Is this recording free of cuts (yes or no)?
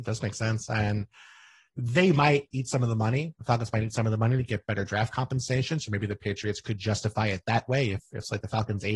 yes